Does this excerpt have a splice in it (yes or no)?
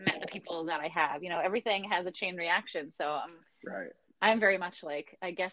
no